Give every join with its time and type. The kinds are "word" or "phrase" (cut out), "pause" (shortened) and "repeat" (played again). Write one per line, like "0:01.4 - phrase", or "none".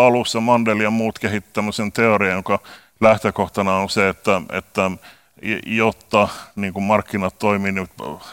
none

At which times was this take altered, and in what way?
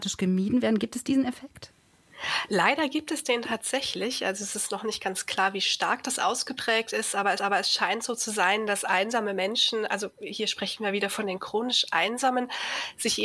0:07.4 - repeat

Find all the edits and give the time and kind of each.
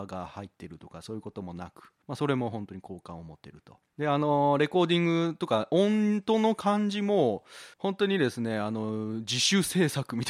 0:02.0 - pause
0:03.9 - pause
0:07.7 - pause

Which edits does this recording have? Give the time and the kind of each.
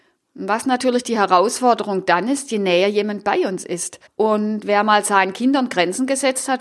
0:04.1 - pause

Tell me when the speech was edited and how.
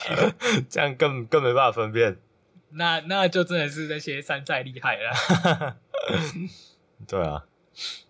0:02.4 - pause

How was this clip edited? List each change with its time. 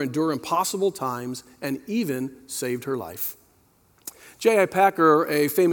none

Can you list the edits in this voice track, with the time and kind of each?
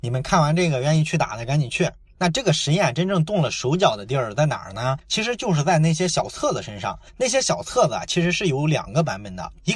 none

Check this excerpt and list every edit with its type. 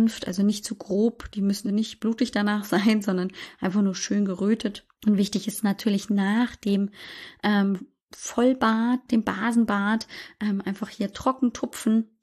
0:01.6 - word
0:04.9 - pause
0:09.1 - word

